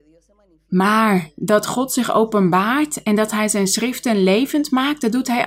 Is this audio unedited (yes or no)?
yes